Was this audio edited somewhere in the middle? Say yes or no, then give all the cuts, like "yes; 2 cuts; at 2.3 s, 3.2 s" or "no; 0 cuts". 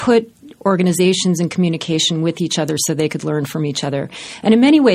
no; 0 cuts